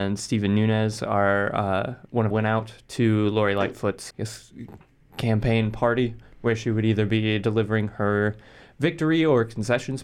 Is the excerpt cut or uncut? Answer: cut